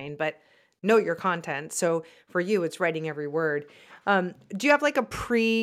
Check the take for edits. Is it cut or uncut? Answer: uncut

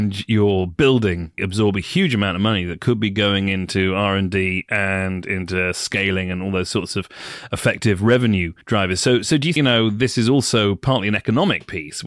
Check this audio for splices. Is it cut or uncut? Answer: cut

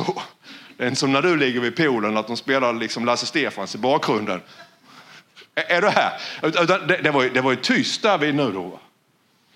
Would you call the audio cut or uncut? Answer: uncut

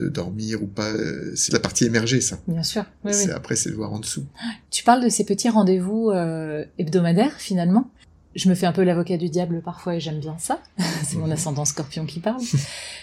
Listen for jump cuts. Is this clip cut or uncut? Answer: cut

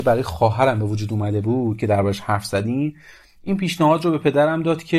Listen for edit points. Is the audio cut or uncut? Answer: uncut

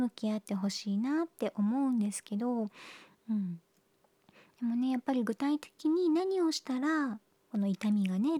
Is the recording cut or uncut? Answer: uncut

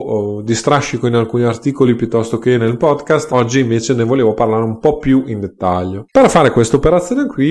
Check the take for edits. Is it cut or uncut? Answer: cut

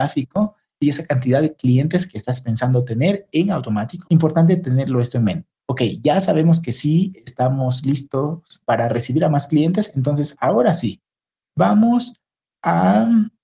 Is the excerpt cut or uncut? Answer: uncut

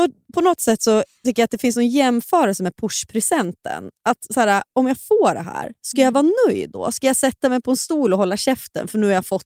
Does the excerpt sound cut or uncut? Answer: uncut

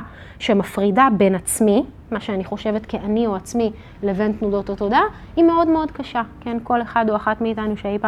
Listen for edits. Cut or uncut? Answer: uncut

